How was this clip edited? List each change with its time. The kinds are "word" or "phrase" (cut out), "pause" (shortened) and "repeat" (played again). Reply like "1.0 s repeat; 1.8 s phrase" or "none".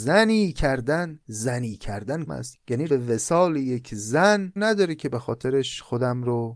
1.2 s pause; 2.3 s word; 2.9 s word; 4.6 s phrase